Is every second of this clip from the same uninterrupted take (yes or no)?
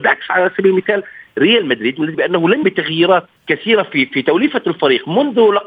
no